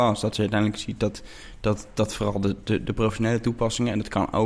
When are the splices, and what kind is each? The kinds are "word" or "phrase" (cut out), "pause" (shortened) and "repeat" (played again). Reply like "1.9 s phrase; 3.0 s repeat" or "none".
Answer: none